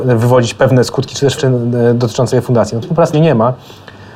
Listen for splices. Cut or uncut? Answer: cut